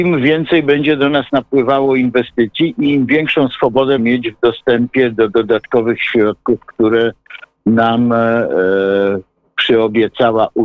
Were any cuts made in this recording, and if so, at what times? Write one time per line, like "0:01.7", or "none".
0:04.0

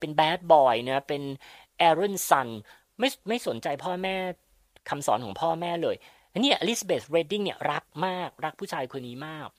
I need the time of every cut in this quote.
none

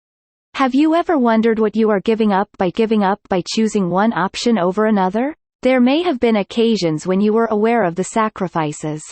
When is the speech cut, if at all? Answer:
0:02.7
0:05.5

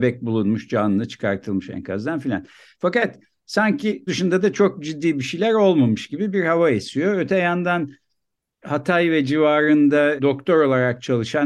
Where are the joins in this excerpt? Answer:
0:04.1
0:10.2

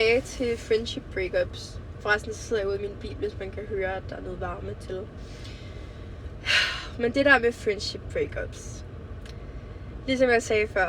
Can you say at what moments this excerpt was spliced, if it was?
none

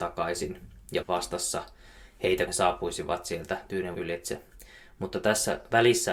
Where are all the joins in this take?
0:01.0
0:02.5
0:03.9

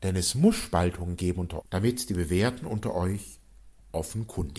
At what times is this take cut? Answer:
0:01.6

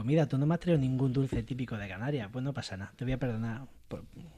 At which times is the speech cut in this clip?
none

